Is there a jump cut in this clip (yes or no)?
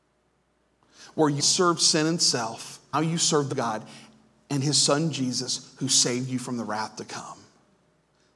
yes